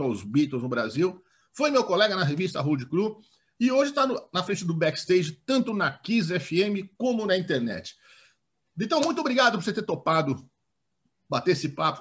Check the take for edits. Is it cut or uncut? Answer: uncut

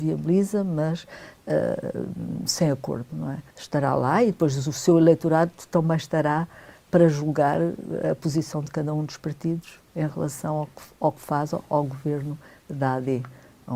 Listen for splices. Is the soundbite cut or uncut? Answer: cut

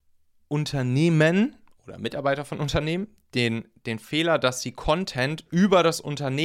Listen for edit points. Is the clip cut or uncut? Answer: uncut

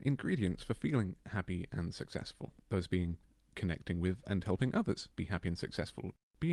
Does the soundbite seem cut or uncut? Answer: cut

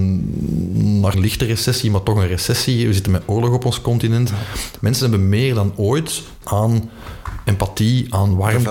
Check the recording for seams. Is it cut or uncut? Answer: cut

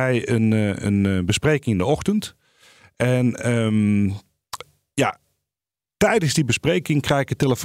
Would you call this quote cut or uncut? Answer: uncut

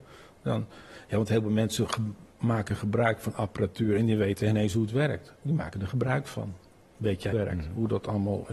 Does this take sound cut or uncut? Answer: cut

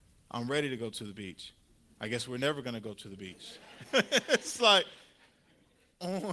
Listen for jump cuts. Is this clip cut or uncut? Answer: uncut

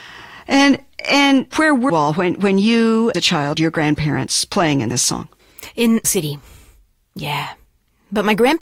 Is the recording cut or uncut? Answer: cut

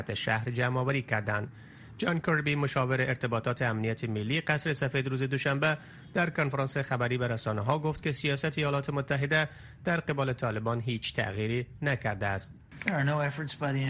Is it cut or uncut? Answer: uncut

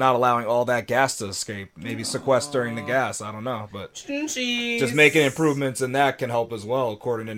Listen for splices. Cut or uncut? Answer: uncut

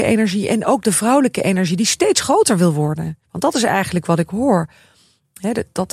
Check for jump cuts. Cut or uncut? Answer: cut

